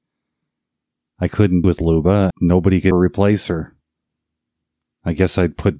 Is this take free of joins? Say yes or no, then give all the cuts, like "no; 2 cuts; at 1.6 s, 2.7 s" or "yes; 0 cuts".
no; 3 cuts; at 1.6 s, 2.3 s, 2.9 s